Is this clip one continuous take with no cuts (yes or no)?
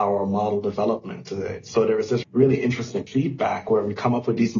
no